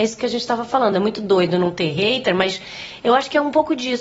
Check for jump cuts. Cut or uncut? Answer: uncut